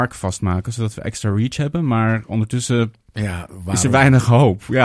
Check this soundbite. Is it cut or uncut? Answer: uncut